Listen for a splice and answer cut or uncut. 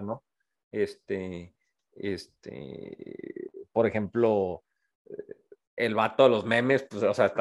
uncut